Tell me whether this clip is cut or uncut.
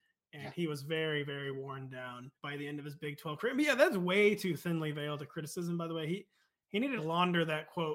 cut